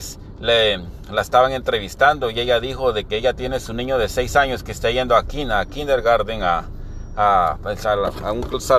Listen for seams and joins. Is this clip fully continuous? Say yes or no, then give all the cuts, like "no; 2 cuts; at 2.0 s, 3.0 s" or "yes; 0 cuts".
yes; 0 cuts